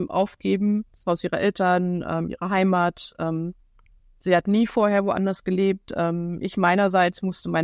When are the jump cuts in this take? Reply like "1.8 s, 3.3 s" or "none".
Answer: none